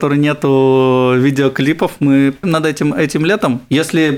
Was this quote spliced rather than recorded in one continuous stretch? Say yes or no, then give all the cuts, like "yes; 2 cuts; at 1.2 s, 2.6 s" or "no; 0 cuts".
yes; 1 cut; at 2.4 s